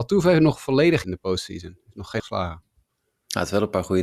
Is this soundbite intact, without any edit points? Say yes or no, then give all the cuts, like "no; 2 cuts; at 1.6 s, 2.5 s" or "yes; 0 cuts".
no; 2 cuts; at 1.0 s, 2.2 s